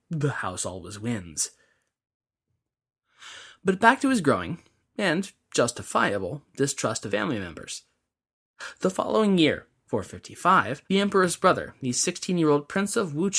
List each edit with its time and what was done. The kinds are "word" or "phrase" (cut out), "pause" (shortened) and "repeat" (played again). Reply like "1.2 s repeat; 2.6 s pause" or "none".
7.1 s word; 10.8 s pause